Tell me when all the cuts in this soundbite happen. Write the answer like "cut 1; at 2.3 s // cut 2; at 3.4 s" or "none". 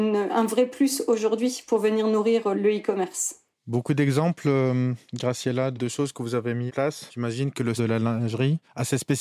cut 1; at 2.5 s // cut 2; at 6.7 s // cut 3; at 7.8 s